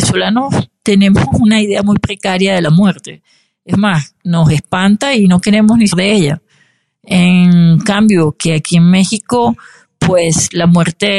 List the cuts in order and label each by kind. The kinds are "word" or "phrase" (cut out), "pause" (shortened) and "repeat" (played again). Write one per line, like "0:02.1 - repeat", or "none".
0:05.9 - phrase